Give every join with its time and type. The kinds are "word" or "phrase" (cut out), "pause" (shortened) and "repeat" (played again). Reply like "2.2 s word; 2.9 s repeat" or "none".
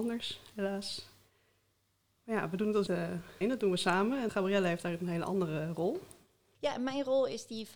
2.9 s word; 3.4 s word; 4.3 s word